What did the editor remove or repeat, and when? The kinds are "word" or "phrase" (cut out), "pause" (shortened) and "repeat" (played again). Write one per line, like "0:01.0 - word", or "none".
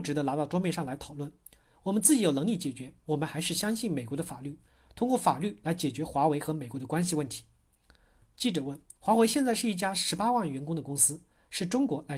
0:09.0 - pause